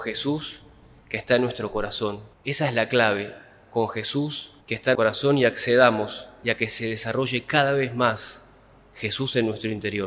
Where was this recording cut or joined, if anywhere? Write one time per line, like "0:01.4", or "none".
0:02.3
0:03.6
0:04.6
0:04.9
0:06.4